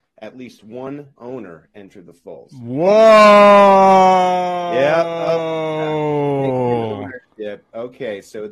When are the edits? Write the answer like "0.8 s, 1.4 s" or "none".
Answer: 1.2 s

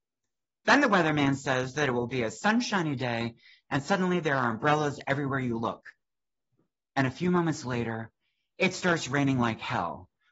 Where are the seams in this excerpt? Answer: none

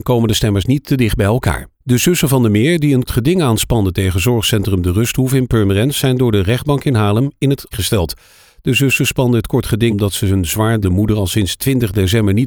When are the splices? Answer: 1.8 s, 3.1 s, 7.7 s, 9.9 s, 10.8 s

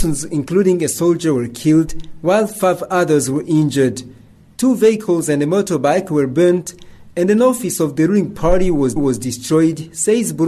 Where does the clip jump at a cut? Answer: 9.0 s

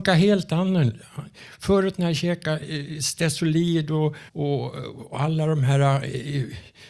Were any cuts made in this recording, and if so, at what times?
4.3 s

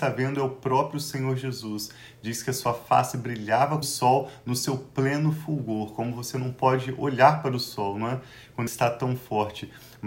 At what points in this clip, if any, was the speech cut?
3.8 s, 8.7 s

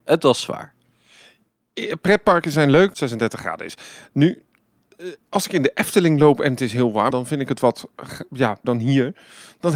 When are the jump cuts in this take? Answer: 2.9 s, 7.1 s, 8.6 s

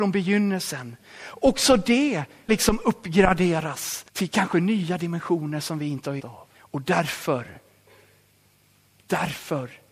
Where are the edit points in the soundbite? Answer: 2.5 s, 4.1 s, 6.2 s, 6.5 s

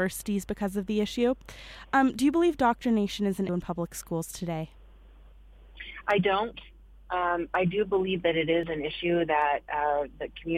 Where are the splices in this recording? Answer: 3.5 s

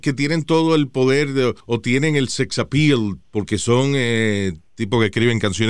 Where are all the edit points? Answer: 1.6 s, 3.2 s

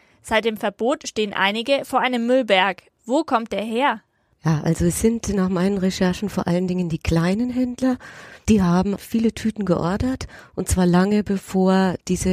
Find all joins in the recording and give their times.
9.0 s

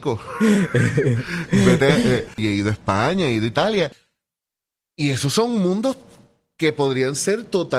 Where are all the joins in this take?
none

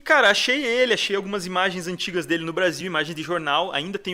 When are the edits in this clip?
none

